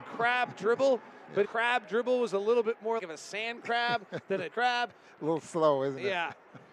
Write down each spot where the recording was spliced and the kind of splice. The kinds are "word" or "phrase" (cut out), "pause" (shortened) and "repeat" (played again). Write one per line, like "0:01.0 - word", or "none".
0:01.4 - word
0:03.0 - word
0:04.5 - word